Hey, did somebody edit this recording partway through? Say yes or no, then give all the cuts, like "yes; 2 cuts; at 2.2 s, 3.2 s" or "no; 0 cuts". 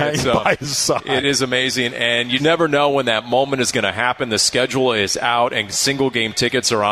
yes; 2 cuts; at 1.2 s, 2.4 s